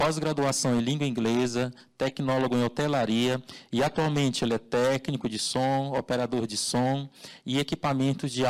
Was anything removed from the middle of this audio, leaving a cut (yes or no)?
no